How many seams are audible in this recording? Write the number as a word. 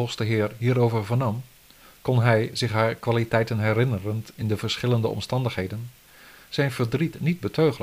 zero